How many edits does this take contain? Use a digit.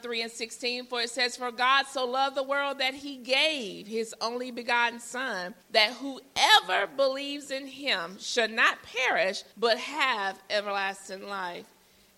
2